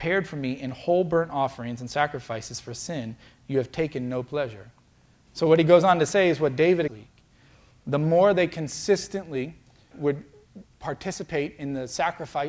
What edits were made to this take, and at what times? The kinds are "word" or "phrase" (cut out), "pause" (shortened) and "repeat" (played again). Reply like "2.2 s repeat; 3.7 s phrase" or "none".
6.9 s phrase; 9.9 s word